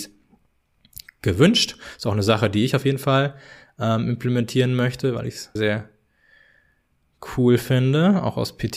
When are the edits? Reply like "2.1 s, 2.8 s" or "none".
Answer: 5.6 s